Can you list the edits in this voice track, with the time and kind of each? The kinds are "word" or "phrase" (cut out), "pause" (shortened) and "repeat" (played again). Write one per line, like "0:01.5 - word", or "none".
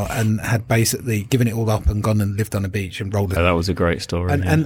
0:03.4 - phrase